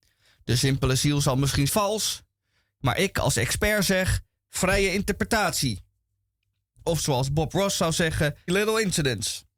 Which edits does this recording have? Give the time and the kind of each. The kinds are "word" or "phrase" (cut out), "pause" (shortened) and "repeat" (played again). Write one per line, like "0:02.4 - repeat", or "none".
0:01.7 - word
0:08.5 - word